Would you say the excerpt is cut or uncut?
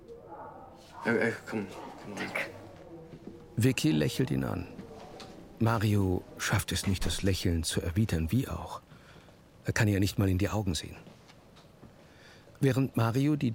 uncut